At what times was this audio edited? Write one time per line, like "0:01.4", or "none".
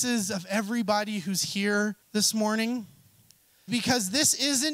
0:02.0
0:03.7